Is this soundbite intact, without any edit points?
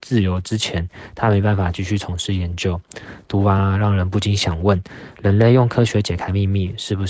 yes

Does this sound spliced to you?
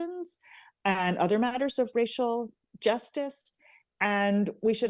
no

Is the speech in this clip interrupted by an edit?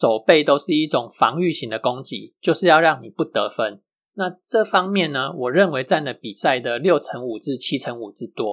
no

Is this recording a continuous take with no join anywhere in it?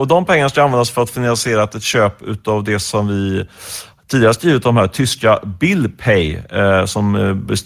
yes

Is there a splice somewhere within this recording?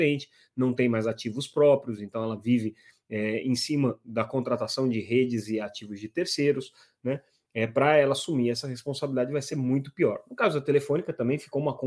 no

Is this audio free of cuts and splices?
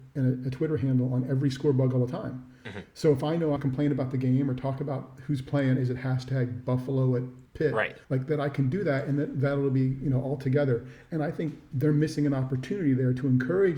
no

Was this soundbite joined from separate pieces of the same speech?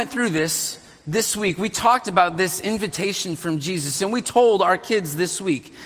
no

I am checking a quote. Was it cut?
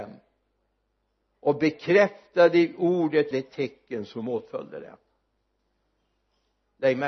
yes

